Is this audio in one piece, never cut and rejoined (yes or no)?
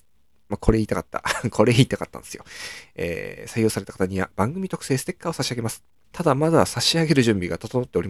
no